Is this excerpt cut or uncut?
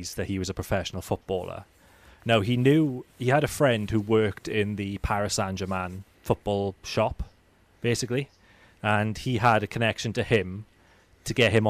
cut